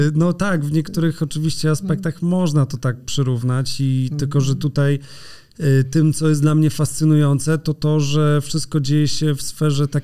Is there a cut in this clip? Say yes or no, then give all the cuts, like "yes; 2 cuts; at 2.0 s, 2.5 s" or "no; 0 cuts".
no; 0 cuts